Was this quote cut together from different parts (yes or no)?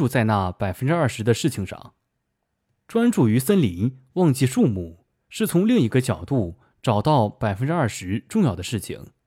no